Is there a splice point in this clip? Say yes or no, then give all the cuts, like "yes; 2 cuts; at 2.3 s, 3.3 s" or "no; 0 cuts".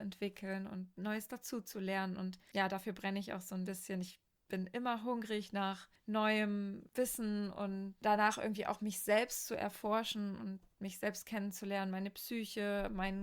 no; 0 cuts